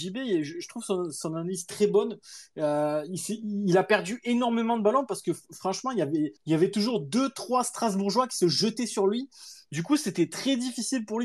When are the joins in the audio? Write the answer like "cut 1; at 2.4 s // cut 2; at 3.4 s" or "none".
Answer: cut 1; at 6.4 s